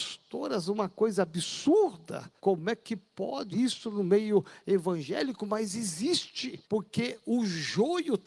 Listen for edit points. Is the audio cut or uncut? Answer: cut